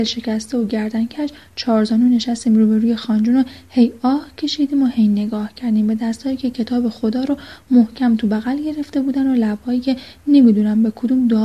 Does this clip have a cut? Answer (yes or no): no